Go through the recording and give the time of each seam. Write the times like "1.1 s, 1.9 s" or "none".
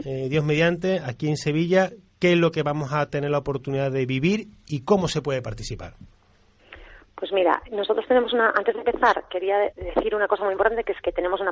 7.7 s, 9.7 s